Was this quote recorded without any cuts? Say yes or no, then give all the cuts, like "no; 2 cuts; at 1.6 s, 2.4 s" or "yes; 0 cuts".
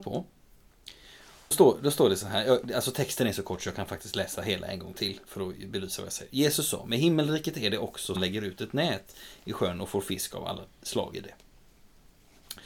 no; 3 cuts; at 1.5 s, 5.2 s, 8.1 s